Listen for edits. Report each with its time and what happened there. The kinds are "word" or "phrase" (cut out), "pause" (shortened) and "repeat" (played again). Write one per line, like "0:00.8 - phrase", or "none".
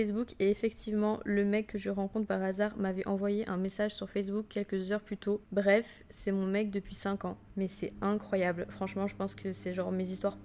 0:05.4 - pause